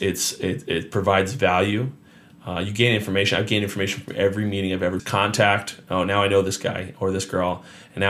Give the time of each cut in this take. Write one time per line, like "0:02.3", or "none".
0:05.0